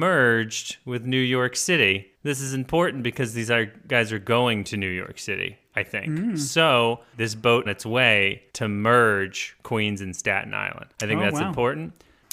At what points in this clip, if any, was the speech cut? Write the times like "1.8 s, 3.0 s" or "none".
2.1 s, 7.1 s, 7.7 s, 8.5 s, 10.9 s

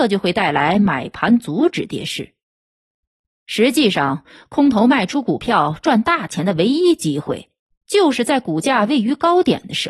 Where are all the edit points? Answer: 7.7 s

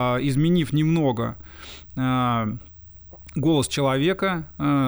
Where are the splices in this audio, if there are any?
none

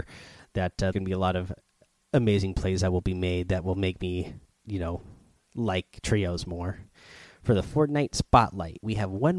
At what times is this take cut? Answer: 0.9 s, 4.4 s

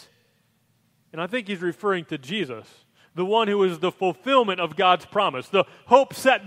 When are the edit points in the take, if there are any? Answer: none

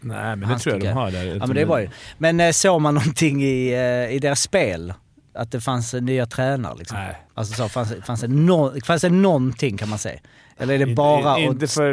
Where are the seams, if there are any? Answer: 7.3 s

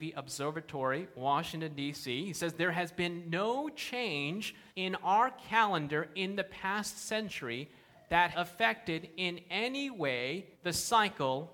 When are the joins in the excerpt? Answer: 4.7 s, 8.3 s, 10.5 s

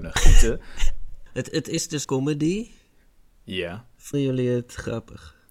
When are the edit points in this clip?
1.5 s, 2.0 s, 4.1 s

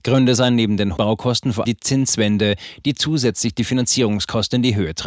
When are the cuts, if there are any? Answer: 1.0 s, 1.6 s

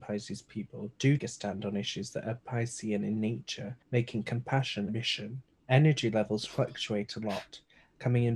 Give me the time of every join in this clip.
1.2 s, 3.8 s, 4.9 s, 5.6 s

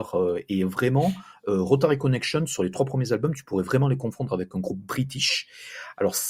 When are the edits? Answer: none

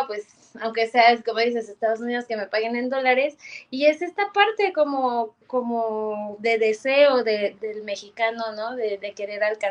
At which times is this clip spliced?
7.5 s

